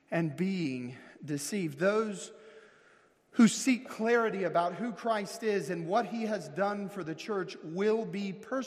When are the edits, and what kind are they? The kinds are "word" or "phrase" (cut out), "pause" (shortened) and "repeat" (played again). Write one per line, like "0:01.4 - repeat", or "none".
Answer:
none